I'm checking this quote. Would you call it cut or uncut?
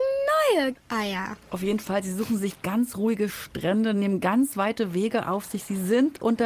uncut